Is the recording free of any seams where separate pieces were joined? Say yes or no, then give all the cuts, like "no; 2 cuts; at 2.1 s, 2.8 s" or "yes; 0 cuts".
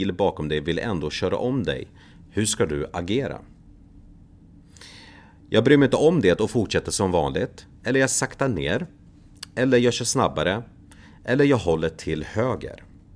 yes; 0 cuts